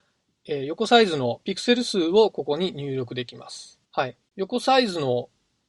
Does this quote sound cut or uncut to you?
cut